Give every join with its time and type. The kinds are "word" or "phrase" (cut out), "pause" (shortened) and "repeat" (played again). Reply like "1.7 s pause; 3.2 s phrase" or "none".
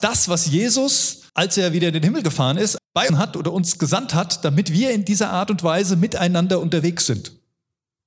1.3 s pause; 2.8 s word; 3.1 s phrase

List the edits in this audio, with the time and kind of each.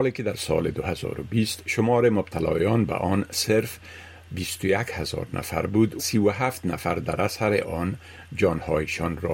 6.0 s word

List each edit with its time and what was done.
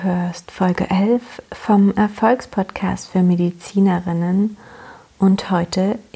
none

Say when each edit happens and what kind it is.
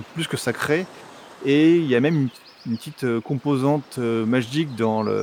none

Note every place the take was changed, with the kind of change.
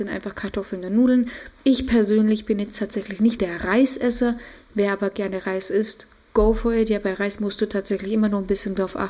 3.4 s word

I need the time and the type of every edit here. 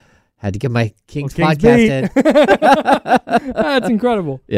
none

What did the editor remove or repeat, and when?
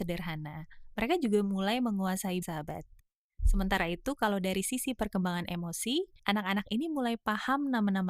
2.4 s word; 6.2 s pause

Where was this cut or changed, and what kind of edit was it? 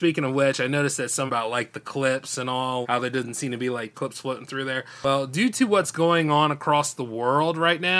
1.3 s phrase; 2.8 s word; 3.9 s phrase

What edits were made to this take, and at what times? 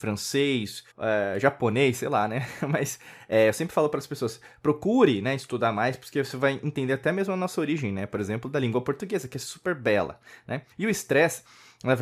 0.9 s pause; 10.7 s pause

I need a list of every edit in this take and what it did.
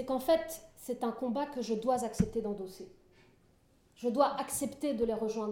none

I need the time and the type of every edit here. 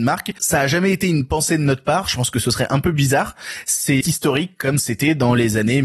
4.0 s word

